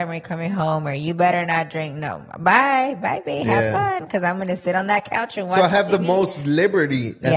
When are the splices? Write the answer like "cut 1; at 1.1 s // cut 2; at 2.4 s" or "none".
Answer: none